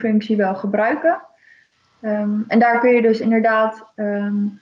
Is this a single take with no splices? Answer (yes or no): yes